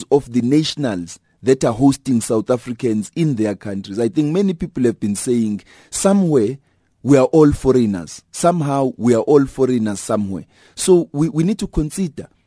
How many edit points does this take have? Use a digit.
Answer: 0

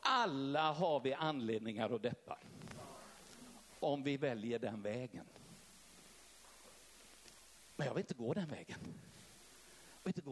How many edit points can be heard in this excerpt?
0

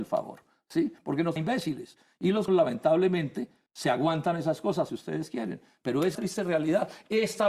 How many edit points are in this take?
5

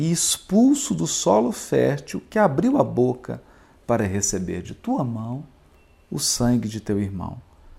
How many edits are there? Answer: 0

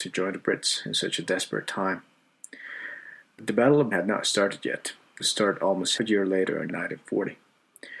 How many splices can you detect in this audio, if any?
5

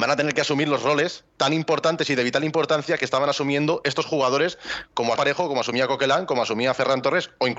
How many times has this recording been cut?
1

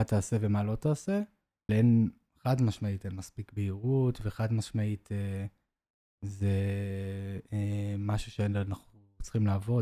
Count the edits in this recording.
1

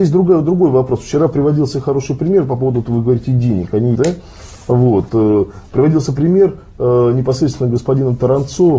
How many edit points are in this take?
1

